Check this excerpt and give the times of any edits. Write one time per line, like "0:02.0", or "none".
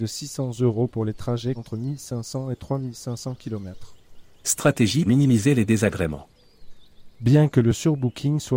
0:01.6
0:05.1